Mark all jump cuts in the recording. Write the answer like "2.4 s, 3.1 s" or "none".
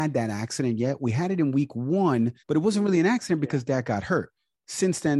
2.4 s